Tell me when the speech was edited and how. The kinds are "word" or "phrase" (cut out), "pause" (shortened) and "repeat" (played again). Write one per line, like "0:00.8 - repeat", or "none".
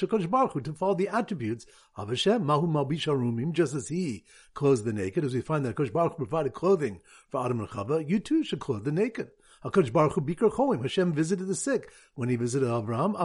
none